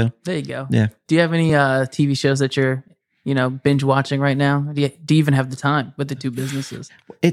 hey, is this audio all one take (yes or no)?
yes